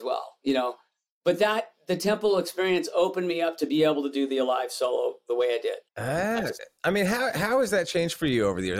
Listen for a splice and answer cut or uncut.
cut